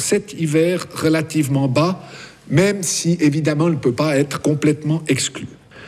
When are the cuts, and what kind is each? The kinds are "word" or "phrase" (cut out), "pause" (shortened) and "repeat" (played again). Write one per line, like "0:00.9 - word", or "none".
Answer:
none